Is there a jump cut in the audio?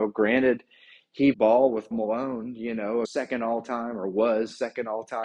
yes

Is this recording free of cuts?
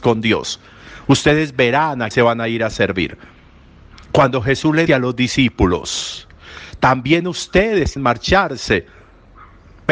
no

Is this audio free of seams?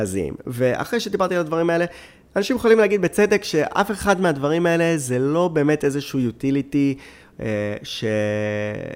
yes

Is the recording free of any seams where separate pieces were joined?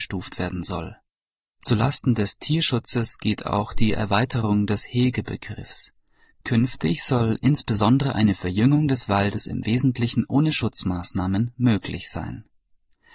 yes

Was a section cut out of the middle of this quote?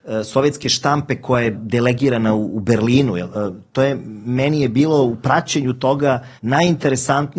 yes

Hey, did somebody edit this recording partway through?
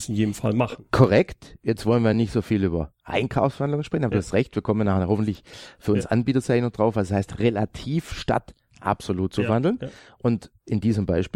no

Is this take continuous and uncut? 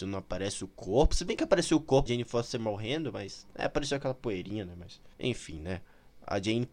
no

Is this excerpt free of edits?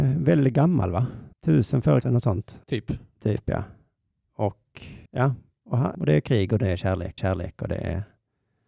no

